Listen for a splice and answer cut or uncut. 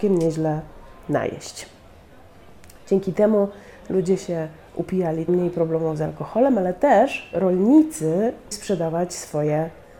cut